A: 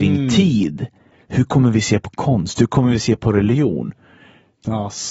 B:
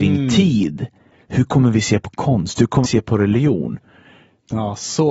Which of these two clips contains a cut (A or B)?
B